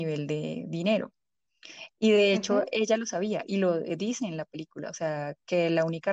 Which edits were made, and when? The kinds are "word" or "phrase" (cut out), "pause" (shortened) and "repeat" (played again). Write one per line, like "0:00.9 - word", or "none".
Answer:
none

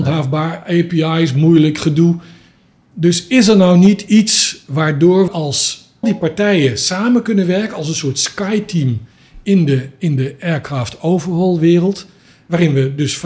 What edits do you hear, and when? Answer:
0:05.3 - word
0:06.0 - word

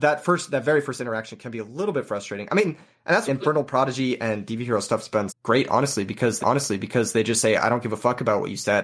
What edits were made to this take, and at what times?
0:03.3 - phrase
0:05.3 - word
0:06.4 - repeat

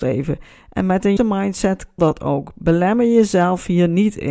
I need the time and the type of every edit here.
0:01.2 - word
0:02.0 - word

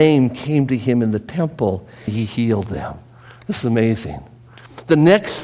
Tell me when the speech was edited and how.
0:02.1 - word

